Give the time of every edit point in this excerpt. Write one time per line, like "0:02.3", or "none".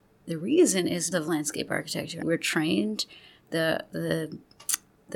0:01.1
0:02.2